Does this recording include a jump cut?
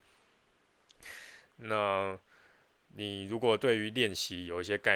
no; 0 cuts

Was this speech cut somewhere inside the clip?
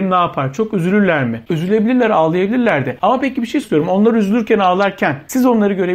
yes; 1 cut; at 3.6 s

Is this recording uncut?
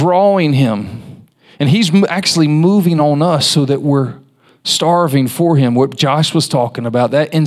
yes; 0 cuts

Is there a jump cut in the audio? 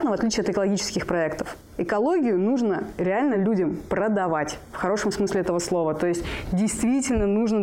no; 0 cuts

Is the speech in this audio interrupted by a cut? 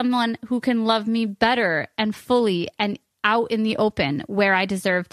no; 0 cuts

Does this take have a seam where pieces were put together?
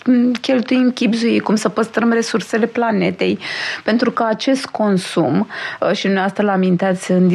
no; 0 cuts

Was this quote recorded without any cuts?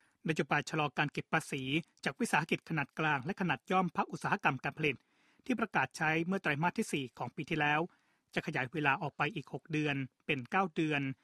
yes; 0 cuts

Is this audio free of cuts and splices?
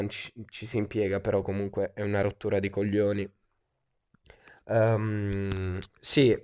yes; 0 cuts

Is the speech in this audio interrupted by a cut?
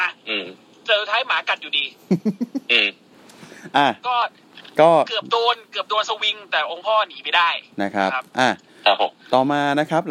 no; 0 cuts

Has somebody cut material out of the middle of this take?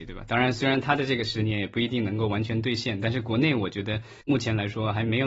yes; 1 cut; at 4.2 s

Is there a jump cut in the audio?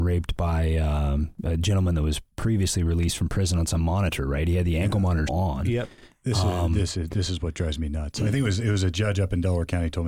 yes; 1 cut; at 5.3 s

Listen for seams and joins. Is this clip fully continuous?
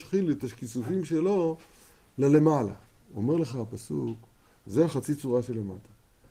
yes; 0 cuts

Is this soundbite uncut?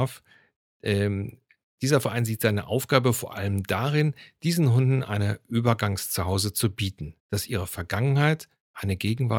no; 1 cut; at 7.2 s

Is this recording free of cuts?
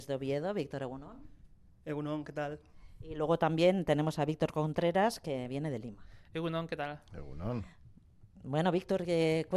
yes; 0 cuts

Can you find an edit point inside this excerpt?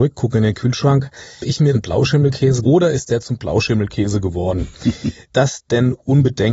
yes; 4 cuts; at 1.4 s, 1.7 s, 2.6 s, 5.3 s

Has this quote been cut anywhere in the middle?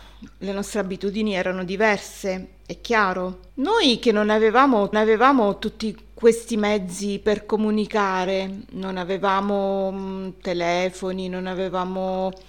yes; 2 cuts; at 3.5 s, 4.9 s

